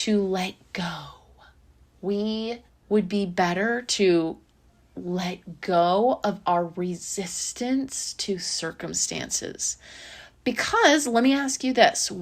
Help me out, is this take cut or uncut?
cut